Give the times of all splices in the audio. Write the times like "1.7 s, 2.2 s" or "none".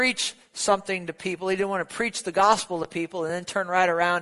none